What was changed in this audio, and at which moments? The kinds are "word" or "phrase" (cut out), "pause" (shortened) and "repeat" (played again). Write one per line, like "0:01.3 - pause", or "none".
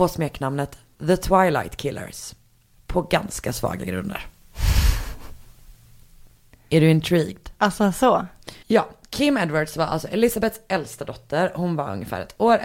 0:08.6 - pause